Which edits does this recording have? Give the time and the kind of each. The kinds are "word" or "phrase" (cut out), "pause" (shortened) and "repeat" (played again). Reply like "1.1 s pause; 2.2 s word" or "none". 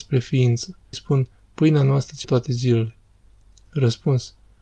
0.9 s phrase; 2.2 s word